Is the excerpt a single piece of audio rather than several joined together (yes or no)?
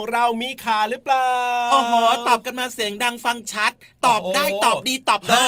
yes